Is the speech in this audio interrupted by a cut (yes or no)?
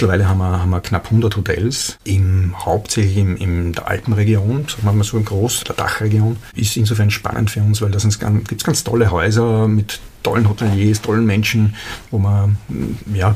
yes